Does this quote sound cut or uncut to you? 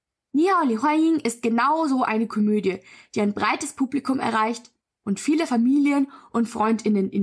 uncut